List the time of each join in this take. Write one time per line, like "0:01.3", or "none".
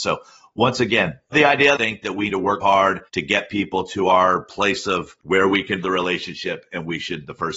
0:01.3
0:01.7
0:02.3
0:02.6
0:03.1
0:05.2
0:05.8